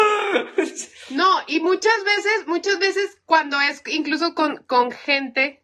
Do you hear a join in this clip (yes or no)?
no